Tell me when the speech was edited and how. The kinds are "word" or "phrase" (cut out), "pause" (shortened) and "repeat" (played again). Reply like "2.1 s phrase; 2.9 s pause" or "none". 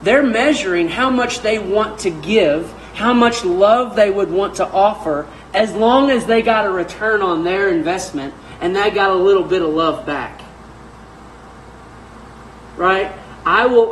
none